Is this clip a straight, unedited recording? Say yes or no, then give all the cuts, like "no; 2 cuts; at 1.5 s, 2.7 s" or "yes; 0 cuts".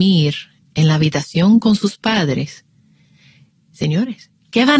yes; 0 cuts